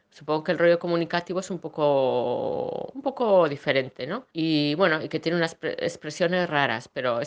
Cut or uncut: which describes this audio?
cut